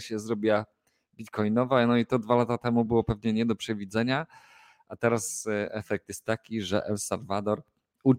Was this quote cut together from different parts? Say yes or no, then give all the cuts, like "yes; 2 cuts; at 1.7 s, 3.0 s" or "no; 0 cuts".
no; 0 cuts